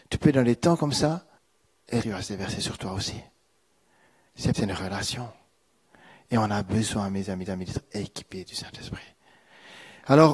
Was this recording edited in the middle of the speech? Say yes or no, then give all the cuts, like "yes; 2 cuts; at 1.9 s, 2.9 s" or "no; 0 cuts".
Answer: yes; 4 cuts; at 1.4 s, 2.0 s, 4.5 s, 7.5 s